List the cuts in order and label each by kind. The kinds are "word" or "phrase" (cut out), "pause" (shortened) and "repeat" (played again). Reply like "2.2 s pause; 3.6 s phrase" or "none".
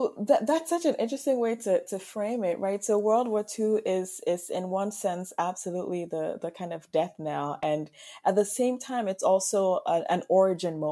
none